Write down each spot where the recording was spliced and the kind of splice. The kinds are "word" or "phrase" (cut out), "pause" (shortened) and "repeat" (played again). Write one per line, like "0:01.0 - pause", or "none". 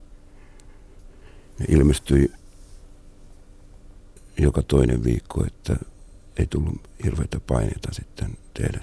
none